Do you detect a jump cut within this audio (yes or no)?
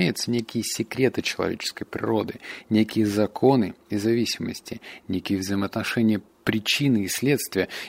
yes